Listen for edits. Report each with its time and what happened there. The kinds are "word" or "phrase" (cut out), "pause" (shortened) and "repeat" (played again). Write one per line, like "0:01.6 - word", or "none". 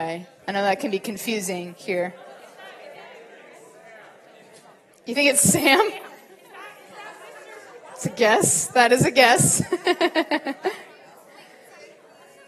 none